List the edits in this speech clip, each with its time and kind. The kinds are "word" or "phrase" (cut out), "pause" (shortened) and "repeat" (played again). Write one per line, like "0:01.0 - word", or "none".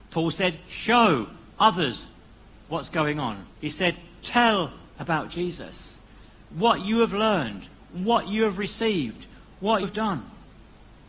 0:02.6 - pause
0:03.5 - pause
0:05.0 - word
0:09.8 - word